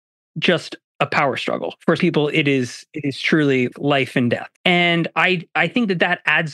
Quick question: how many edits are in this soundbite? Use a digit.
3